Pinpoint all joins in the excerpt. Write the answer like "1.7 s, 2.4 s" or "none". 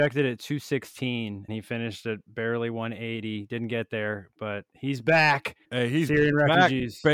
1.5 s, 5.6 s